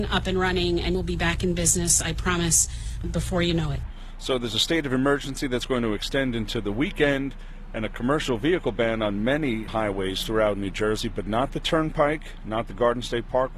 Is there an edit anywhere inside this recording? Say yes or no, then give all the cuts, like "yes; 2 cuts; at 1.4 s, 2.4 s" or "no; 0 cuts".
yes; 3 cuts; at 0.9 s, 3.0 s, 9.7 s